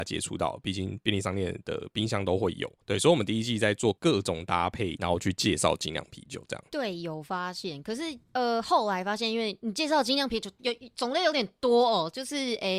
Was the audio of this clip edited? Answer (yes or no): yes